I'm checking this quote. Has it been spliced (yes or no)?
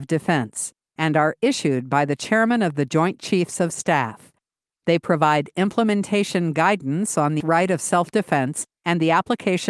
yes